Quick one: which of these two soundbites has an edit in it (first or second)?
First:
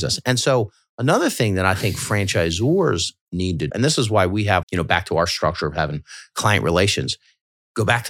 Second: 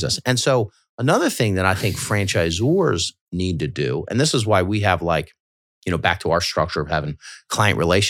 first